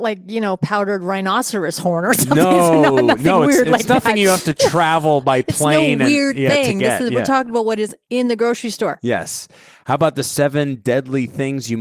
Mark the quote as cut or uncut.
uncut